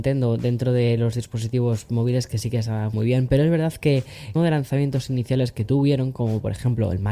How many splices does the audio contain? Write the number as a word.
two